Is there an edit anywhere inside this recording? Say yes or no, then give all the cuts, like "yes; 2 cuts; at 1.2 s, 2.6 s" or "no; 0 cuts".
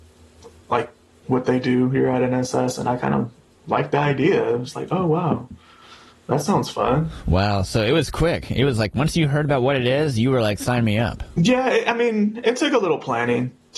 no; 0 cuts